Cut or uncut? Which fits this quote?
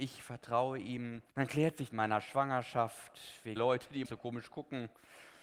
cut